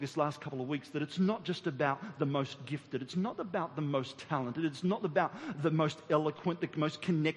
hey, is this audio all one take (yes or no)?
yes